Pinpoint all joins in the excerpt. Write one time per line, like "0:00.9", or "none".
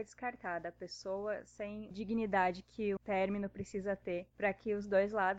0:01.9
0:03.0
0:04.3